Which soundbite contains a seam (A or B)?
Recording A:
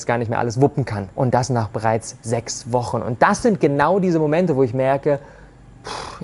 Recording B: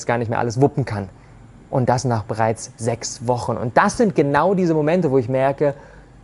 A